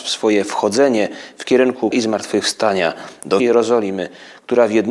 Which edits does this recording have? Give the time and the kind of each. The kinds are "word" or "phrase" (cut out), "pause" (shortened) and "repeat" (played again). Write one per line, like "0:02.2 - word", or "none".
0:01.9 - word
0:03.4 - word